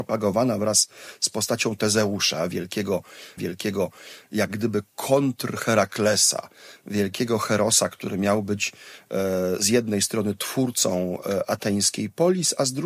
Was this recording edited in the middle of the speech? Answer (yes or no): yes